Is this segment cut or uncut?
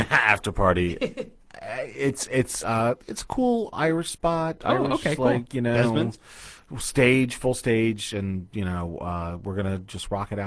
cut